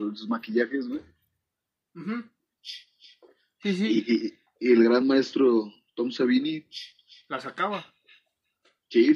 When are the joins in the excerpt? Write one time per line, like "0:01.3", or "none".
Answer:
none